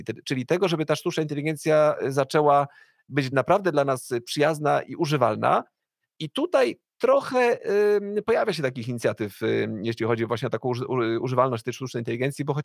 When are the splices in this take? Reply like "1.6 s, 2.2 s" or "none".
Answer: none